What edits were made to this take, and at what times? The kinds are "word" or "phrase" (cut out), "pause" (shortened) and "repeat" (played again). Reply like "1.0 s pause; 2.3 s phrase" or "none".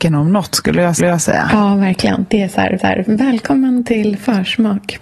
1.0 s repeat; 2.8 s repeat